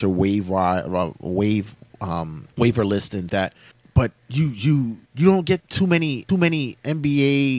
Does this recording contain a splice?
yes; 6 cuts; at 2.5 s, 3.3 s, 4.2 s, 5.1 s, 5.6 s, 6.3 s

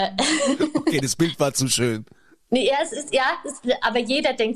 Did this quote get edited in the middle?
no; 0 cuts

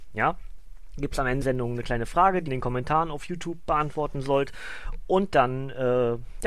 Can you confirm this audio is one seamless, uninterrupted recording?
no; 2 cuts; at 1.4 s, 2.5 s

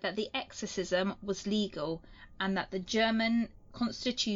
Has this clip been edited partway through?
no; 0 cuts

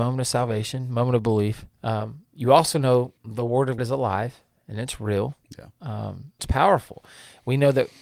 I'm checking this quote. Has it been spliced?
yes; 4 cuts; at 1.7 s, 3.2 s, 3.8 s, 6.4 s

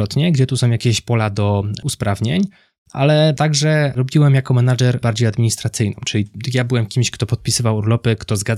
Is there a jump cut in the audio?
yes; 1 cut; at 5.0 s

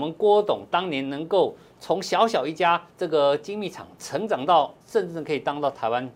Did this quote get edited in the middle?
yes; 2 cuts; at 2.9 s, 4.8 s

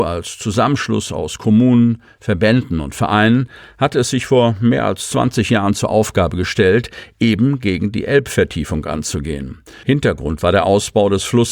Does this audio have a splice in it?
no; 0 cuts

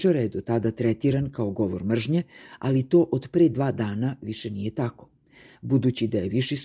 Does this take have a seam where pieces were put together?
no; 0 cuts

